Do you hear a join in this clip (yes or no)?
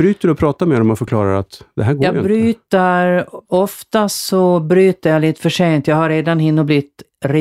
yes